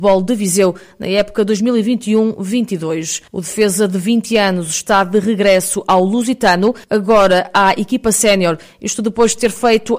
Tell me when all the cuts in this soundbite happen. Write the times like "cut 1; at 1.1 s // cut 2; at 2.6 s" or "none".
cut 1; at 3.3 s // cut 2; at 6.8 s